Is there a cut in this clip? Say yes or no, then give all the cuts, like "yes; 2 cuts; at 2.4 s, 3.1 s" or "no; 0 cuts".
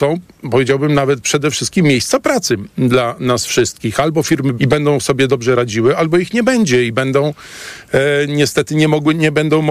yes; 1 cut; at 4.6 s